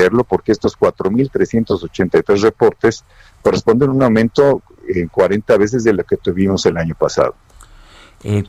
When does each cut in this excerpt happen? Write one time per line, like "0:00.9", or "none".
none

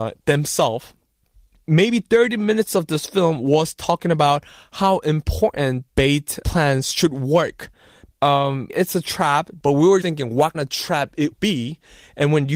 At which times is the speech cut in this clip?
0:05.9
0:06.4
0:08.7
0:10.0
0:10.5
0:11.3

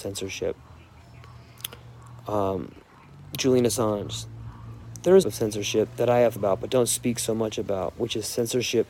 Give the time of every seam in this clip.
0:05.2
0:06.4

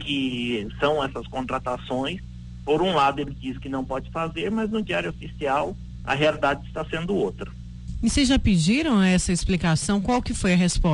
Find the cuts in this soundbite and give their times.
none

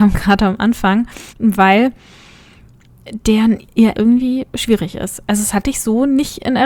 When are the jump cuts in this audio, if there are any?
0:01.3
0:03.9

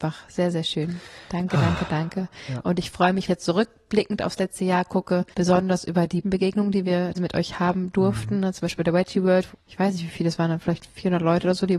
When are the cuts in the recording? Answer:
0:03.3
0:05.3
0:06.2
0:07.1
0:09.5

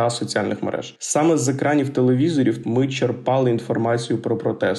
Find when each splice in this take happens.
0:02.6

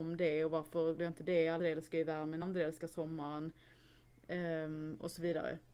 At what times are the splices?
0:01.0
0:01.6
0:02.4

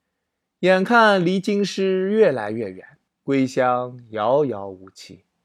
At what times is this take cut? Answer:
0:03.1

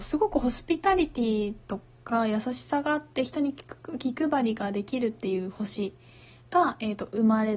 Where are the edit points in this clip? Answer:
none

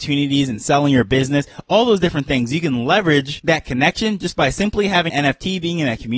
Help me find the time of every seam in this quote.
0:05.1

